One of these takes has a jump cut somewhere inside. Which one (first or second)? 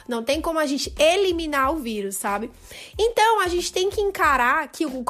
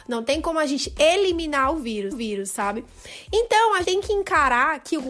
second